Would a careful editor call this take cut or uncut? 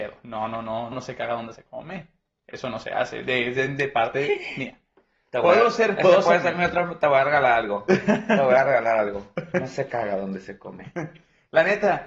cut